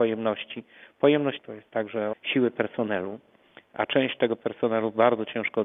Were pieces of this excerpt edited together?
yes; 2 cuts; at 1.4 s, 2.1 s

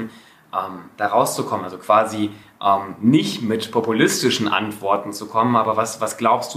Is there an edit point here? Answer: no; 0 cuts

